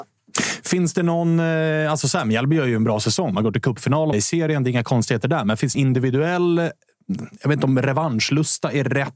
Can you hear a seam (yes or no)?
yes